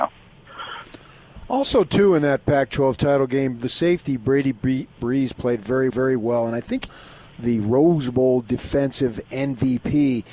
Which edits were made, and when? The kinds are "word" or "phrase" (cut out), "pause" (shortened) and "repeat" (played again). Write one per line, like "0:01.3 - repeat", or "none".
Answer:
0:05.9 - repeat
0:06.9 - phrase